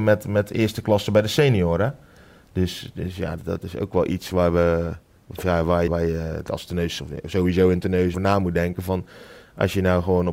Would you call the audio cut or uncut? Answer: cut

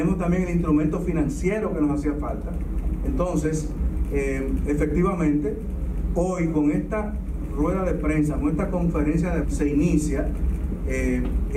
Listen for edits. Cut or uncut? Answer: cut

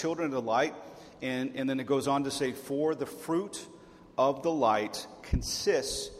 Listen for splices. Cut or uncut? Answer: uncut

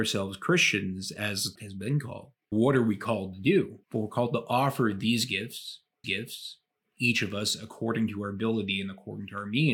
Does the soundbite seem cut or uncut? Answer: cut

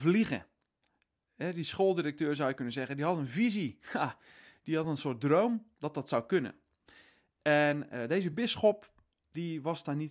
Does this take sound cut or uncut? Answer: uncut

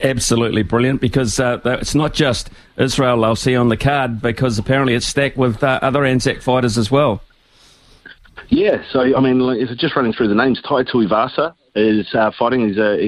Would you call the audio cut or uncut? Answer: uncut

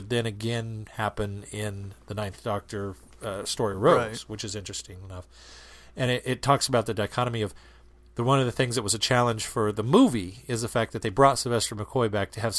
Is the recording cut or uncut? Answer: uncut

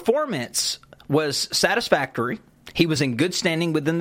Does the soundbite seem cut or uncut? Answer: uncut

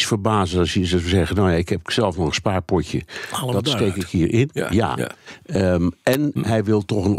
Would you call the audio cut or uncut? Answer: uncut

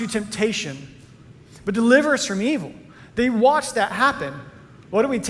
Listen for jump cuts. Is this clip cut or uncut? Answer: uncut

